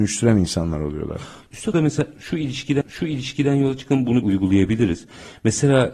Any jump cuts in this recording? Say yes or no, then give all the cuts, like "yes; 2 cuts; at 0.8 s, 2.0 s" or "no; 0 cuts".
yes; 3 cuts; at 1.7 s, 2.8 s, 4.2 s